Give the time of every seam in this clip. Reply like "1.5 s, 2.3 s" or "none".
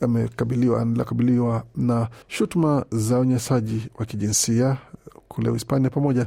2.2 s